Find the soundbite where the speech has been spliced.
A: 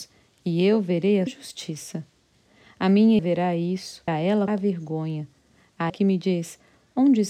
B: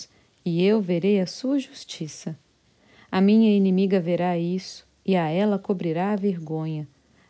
A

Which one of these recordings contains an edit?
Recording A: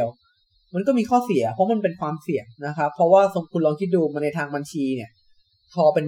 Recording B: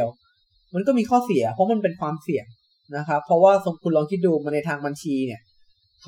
A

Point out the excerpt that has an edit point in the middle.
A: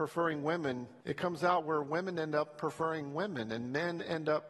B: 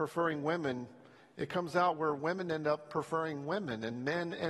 A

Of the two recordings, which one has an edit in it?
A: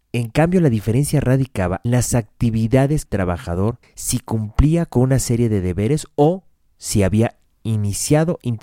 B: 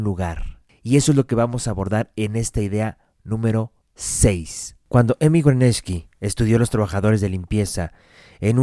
A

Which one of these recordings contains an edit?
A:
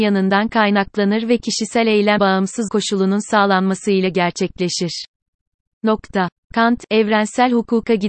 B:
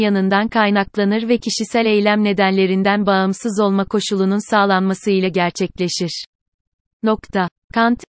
A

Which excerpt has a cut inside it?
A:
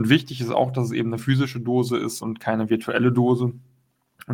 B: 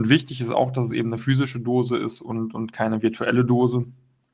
A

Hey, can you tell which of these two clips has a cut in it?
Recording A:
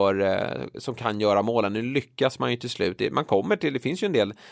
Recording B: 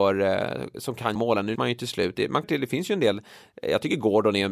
B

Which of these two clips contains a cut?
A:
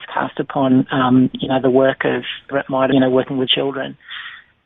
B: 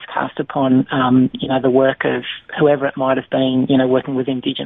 A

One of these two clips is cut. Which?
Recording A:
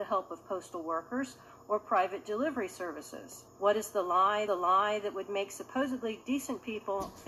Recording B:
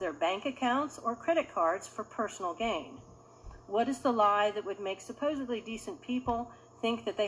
A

